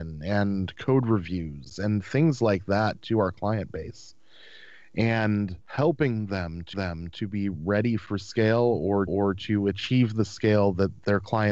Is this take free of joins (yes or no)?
no